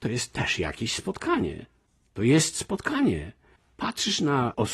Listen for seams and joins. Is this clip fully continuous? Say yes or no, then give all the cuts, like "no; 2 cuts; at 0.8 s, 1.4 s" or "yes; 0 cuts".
yes; 0 cuts